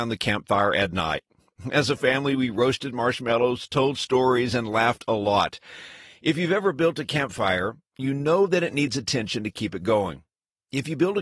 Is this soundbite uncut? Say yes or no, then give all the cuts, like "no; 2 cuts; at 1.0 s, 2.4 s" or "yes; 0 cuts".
yes; 0 cuts